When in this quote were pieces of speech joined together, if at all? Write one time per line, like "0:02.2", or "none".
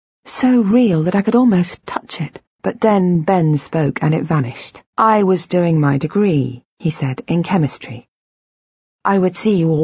0:02.5
0:04.9